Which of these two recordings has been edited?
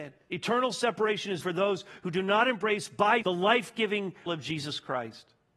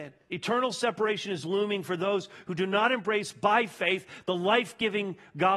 first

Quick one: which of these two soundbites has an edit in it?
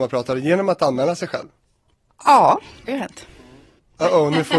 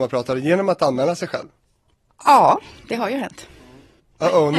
first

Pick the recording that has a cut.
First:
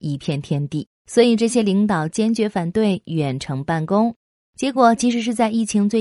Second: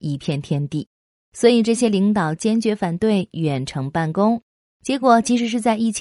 first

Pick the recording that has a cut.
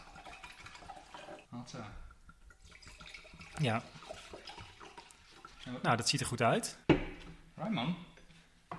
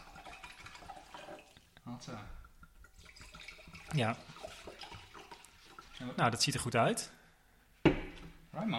first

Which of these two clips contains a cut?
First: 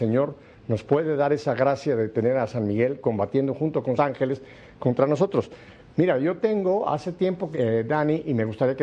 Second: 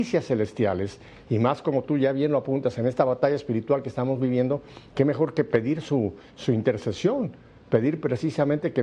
first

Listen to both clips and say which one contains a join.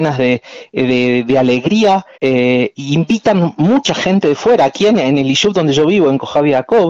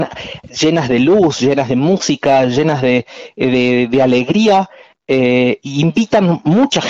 first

